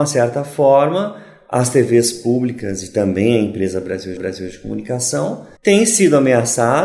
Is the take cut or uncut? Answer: cut